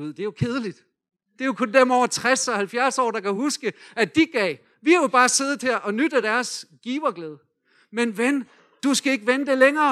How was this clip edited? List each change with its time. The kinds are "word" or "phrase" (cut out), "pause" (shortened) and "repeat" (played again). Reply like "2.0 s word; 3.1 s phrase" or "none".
none